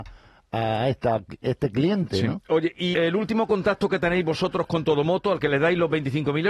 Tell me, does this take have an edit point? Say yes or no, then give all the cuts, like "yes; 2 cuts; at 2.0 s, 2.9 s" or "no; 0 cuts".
yes; 1 cut; at 2.9 s